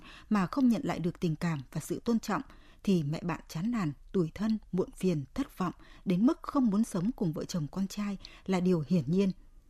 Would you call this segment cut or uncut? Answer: uncut